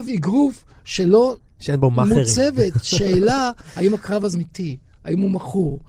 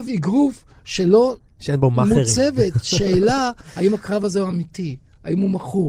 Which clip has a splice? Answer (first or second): first